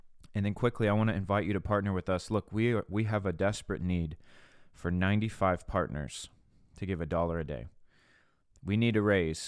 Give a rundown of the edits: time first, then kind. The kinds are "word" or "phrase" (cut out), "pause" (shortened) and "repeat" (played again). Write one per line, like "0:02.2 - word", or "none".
none